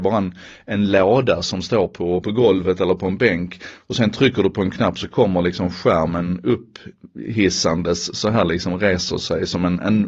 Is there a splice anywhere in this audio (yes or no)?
yes